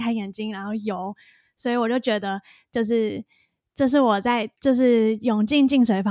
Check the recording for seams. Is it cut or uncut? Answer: cut